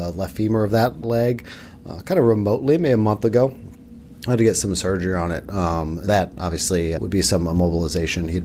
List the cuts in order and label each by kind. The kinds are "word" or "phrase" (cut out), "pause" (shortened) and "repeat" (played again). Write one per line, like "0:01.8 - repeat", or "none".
0:01.0 - word
0:06.1 - word
0:07.0 - word

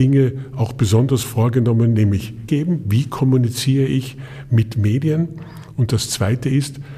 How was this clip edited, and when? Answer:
0:02.5 - word

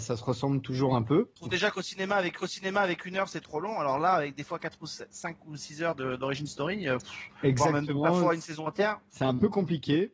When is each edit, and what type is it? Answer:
0:02.4 - repeat

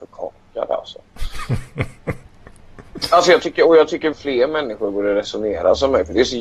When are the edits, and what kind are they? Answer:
0:04.1 - word

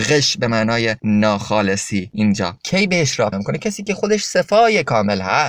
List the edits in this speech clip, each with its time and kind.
0:03.3 - word

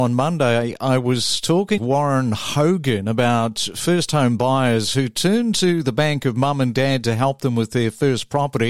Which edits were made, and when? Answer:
0:01.8 - word

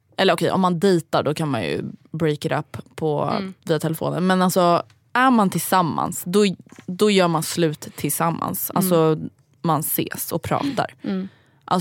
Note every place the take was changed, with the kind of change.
none

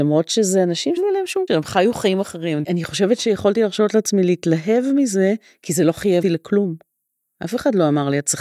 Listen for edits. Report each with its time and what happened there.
0:01.0 - word
0:01.5 - word
0:06.2 - word

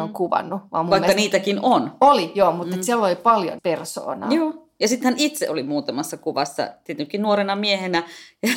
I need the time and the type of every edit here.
0:03.6 - word

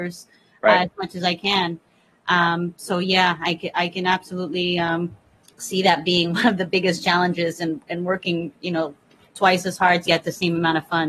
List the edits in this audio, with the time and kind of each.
0:10.1 - word

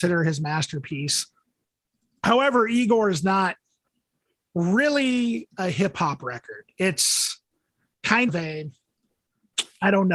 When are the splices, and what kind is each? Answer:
0:08.3 - phrase

